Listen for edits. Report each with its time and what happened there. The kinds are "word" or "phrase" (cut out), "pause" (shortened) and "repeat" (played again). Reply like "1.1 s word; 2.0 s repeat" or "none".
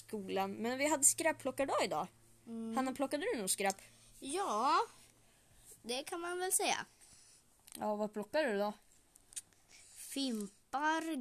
none